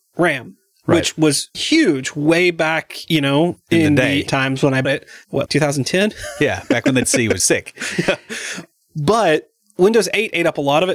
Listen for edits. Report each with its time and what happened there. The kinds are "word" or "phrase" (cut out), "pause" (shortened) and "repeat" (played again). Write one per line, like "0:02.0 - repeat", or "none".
0:01.5 - word
0:04.3 - word
0:04.8 - word
0:05.5 - word
0:07.0 - word
0:07.4 - word